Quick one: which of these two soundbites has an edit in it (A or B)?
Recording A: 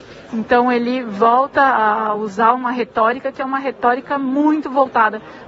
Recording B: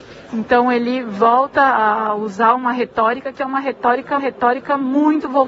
B